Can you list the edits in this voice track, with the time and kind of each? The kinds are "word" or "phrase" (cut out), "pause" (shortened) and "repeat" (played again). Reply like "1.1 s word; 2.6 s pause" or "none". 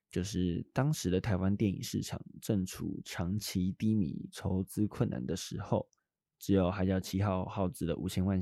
6.0 s pause